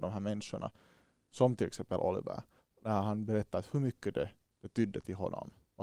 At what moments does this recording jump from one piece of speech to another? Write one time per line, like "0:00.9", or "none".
none